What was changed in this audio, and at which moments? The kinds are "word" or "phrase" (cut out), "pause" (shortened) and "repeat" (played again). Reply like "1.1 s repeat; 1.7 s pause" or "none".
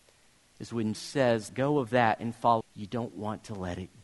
0.9 s word; 1.5 s word; 2.6 s word